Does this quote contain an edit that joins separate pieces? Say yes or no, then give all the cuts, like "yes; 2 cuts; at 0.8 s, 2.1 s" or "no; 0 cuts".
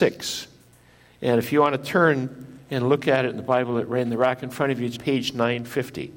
yes; 1 cut; at 4.9 s